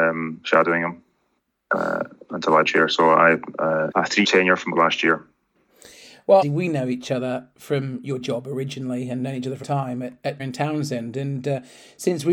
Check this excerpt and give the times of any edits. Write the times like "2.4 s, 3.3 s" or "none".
2.6 s, 3.9 s, 4.2 s, 4.8 s, 6.4 s, 8.2 s, 9.6 s, 10.4 s